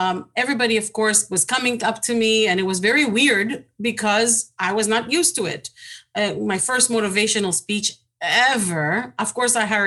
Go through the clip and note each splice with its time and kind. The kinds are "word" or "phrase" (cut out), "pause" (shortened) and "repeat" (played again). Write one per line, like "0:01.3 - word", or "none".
none